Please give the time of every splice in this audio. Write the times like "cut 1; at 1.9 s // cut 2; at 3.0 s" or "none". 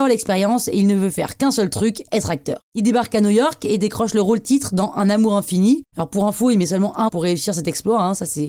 cut 1; at 2.7 s // cut 2; at 7.1 s